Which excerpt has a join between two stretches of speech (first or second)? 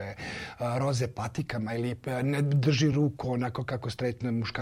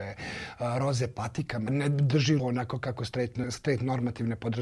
second